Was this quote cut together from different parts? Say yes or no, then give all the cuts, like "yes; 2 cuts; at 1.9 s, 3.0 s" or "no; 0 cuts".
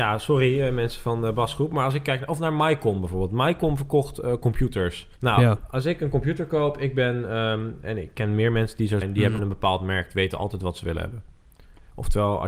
yes; 3 cuts; at 5.2 s, 9.0 s, 9.4 s